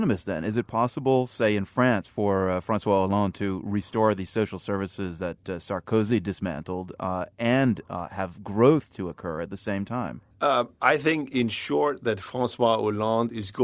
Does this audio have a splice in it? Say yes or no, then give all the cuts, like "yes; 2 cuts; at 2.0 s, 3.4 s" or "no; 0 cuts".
yes; 1 cut; at 10.3 s